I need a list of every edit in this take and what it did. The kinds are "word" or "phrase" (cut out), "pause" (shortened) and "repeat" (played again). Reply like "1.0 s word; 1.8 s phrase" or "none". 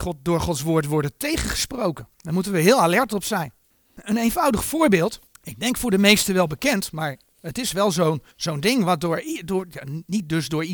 2.1 s pause; 3.7 s pause; 5.3 s pause; 8.3 s pause